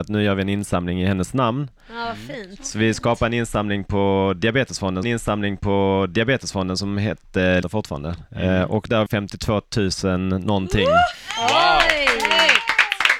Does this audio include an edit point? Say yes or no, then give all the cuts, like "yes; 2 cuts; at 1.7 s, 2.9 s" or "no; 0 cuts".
yes; 3 cuts; at 5.0 s, 7.6 s, 9.1 s